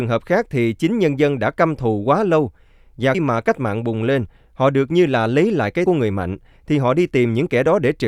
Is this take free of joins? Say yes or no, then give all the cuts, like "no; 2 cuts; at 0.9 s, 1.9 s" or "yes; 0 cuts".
no; 2 cuts; at 3.1 s, 5.9 s